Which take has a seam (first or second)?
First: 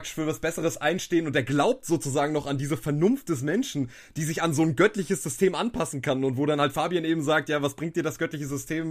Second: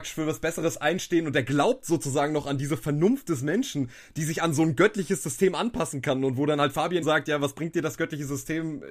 second